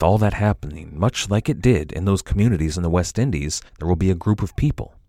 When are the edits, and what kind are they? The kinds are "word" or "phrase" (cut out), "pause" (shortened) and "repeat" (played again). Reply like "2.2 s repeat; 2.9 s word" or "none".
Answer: 3.7 s pause